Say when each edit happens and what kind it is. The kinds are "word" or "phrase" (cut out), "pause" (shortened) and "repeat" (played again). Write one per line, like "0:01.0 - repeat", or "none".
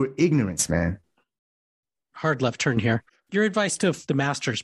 none